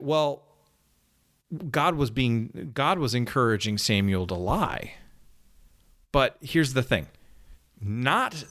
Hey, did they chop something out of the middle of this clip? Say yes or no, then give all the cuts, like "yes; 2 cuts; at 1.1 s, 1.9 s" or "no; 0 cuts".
no; 0 cuts